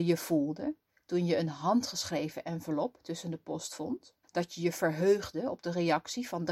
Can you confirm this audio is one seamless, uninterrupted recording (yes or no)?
no